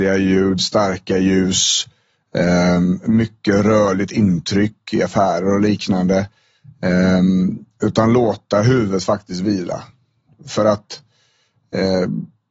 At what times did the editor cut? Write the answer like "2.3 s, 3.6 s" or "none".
none